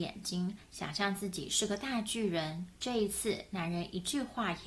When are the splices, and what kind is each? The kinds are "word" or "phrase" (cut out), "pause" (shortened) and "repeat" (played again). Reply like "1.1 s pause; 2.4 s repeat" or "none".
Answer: 2.7 s pause